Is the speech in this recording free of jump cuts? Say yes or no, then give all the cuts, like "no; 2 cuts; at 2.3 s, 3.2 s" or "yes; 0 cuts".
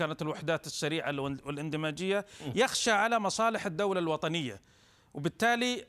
yes; 0 cuts